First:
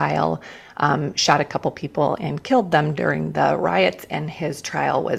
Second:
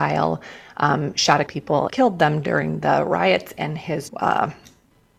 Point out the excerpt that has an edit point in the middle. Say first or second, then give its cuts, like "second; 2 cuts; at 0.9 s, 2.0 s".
second; 3 cuts; at 1.5 s, 1.9 s, 4.1 s